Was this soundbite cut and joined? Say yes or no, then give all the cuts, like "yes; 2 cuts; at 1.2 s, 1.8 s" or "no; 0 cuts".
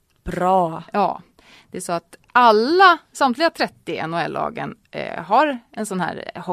no; 0 cuts